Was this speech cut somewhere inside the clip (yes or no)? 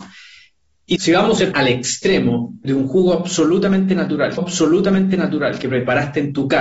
yes